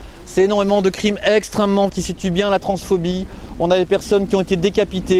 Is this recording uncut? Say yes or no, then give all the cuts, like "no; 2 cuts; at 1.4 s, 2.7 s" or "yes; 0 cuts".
no; 1 cut; at 1.9 s